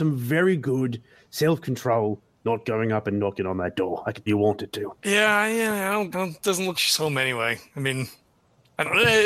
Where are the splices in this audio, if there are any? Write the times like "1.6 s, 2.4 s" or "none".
4.3 s, 5.0 s, 6.1 s, 6.7 s